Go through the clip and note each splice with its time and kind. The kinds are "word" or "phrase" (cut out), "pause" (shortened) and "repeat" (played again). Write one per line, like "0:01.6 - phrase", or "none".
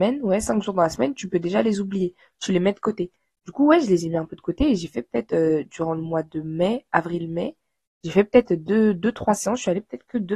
none